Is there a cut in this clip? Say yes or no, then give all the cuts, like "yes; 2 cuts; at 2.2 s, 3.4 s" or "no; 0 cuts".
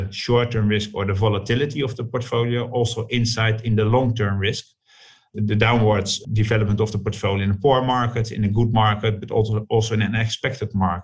no; 0 cuts